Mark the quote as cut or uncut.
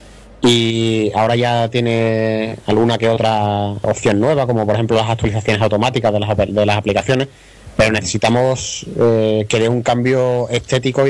cut